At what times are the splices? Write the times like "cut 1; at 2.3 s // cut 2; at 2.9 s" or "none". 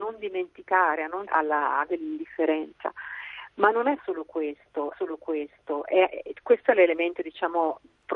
cut 1; at 1.3 s // cut 2; at 1.9 s // cut 3; at 4.9 s